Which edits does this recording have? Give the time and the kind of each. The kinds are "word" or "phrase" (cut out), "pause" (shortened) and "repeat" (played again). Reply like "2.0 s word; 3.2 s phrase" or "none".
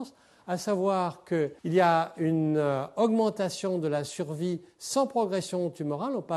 1.6 s pause